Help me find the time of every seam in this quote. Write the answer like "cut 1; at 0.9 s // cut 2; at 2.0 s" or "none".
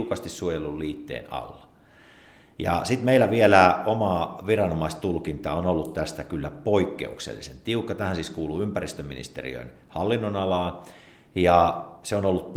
none